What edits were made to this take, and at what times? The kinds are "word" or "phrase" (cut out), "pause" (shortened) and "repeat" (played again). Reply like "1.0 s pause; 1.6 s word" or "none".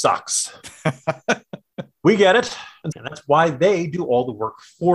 2.9 s phrase